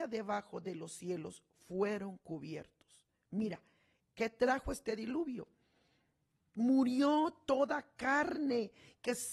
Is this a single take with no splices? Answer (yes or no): yes